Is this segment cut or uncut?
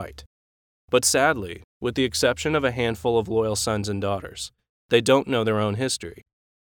uncut